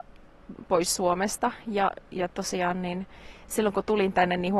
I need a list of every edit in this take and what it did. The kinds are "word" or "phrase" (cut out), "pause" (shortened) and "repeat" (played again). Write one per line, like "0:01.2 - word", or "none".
none